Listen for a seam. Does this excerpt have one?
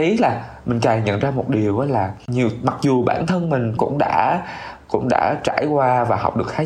yes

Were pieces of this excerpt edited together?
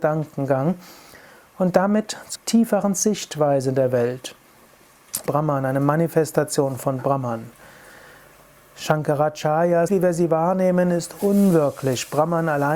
yes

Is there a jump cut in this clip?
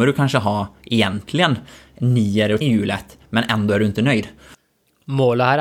yes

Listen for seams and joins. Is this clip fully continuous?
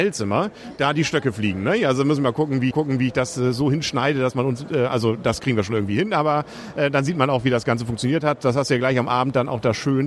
no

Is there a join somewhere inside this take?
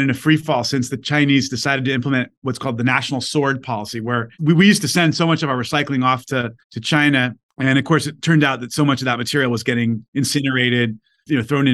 yes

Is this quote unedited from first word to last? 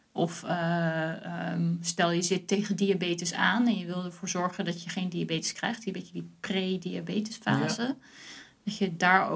yes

